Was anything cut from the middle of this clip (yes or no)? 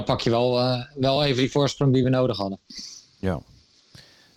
no